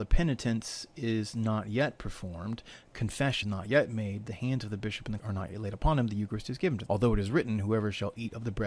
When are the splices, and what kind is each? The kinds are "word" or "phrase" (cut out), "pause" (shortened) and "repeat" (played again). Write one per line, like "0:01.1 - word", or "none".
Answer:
0:03.4 - word
0:05.2 - word
0:06.9 - word